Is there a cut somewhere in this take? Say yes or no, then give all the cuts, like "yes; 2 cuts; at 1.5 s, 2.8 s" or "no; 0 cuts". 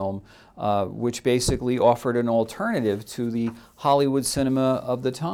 no; 0 cuts